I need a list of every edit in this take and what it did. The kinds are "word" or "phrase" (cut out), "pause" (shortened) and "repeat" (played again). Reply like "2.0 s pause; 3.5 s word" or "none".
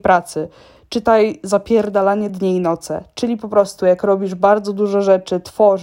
none